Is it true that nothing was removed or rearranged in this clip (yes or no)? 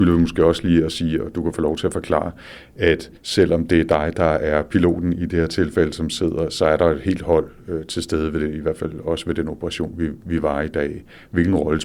no